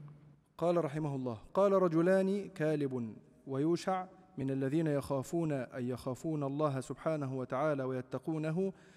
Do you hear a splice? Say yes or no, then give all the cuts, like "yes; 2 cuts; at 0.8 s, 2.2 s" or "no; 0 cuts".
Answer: no; 0 cuts